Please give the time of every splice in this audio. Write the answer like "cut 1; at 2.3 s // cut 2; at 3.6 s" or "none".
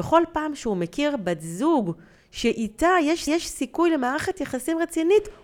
cut 1; at 3.3 s